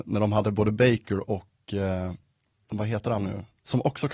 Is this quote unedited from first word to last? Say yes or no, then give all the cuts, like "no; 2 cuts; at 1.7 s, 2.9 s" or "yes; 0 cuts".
yes; 0 cuts